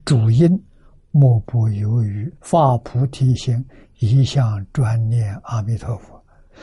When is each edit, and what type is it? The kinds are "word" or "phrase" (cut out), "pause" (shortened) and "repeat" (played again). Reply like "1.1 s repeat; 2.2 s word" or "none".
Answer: 2.4 s pause